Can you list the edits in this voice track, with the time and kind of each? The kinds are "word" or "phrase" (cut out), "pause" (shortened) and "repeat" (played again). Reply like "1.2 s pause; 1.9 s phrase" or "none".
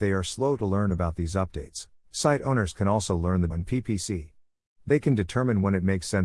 2.0 s pause; 3.5 s phrase